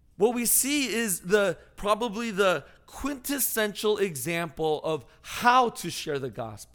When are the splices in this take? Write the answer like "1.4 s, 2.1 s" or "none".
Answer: none